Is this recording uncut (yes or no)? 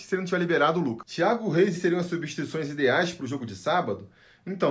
no